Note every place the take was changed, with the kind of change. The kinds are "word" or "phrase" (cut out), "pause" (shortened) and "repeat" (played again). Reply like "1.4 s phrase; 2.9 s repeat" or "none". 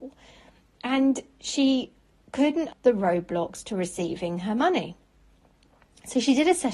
2.7 s word